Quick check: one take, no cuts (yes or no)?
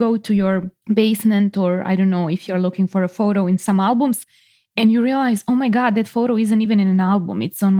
yes